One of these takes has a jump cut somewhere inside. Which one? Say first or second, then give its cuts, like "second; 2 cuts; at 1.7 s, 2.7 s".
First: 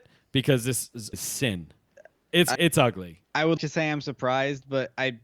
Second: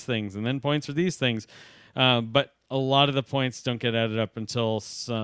first; 5 cuts; at 1.1 s, 1.9 s, 2.6 s, 3.2 s, 3.6 s